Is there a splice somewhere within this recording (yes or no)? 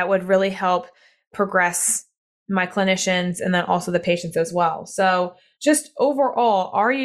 no